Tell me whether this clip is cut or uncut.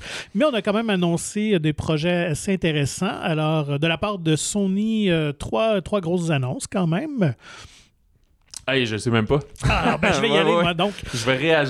uncut